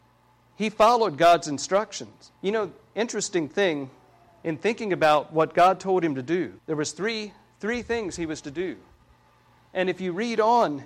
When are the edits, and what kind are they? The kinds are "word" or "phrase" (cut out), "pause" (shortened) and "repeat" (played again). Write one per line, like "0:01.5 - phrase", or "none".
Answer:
0:02.4 - pause
0:06.6 - pause